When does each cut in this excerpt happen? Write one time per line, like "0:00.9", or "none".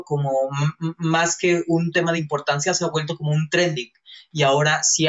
none